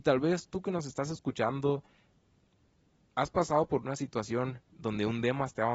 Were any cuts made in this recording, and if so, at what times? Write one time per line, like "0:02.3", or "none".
none

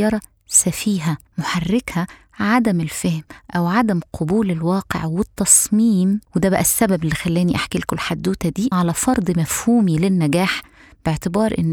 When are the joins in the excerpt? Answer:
0:01.3
0:06.2
0:08.7

